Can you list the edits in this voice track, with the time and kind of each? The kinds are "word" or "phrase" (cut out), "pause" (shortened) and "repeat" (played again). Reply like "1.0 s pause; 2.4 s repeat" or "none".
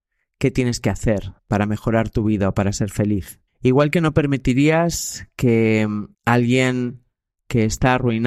1.4 s pause; 3.5 s pause; 6.1 s pause